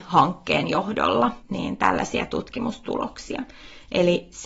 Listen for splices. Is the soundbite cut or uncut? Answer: cut